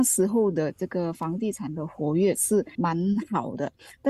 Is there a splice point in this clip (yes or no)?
no